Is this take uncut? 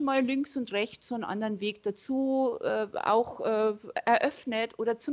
yes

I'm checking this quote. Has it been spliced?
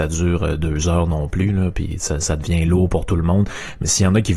no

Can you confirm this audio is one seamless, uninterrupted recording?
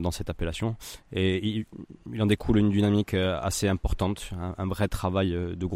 yes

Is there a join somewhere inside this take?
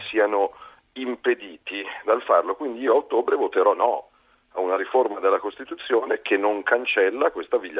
no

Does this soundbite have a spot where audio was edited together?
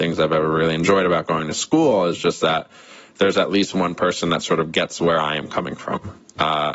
no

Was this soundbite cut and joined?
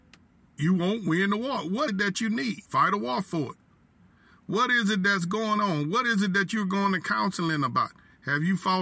yes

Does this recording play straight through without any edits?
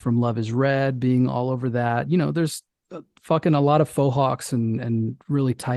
yes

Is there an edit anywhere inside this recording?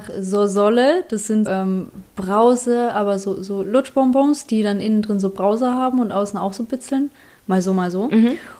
yes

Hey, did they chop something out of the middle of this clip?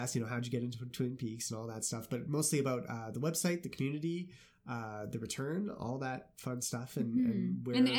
no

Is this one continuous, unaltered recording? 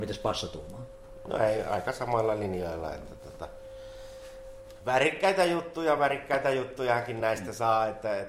yes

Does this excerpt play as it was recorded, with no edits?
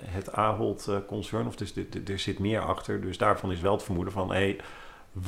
yes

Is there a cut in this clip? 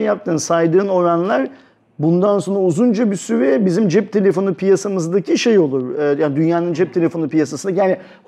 no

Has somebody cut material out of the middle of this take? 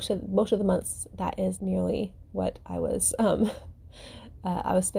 yes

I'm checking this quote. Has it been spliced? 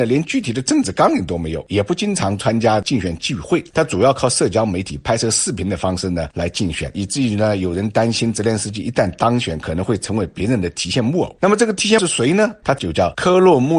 no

